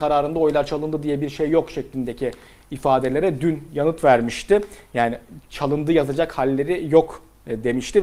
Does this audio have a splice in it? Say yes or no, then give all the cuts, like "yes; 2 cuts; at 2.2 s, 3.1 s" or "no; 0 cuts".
no; 0 cuts